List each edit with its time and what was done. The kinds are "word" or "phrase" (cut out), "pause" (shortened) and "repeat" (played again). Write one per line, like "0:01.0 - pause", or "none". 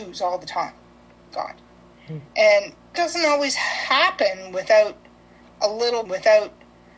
0:01.3 - phrase
0:02.9 - word
0:06.1 - repeat